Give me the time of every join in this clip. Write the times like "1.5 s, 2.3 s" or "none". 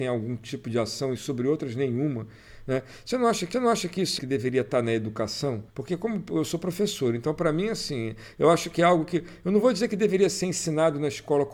3.5 s, 4.2 s, 5.7 s